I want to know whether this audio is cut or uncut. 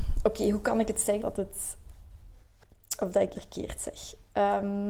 cut